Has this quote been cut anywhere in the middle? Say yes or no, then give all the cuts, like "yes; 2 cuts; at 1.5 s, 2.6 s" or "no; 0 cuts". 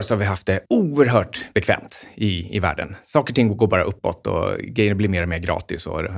no; 0 cuts